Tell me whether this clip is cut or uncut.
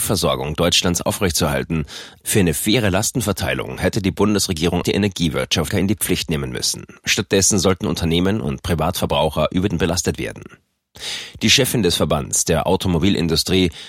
cut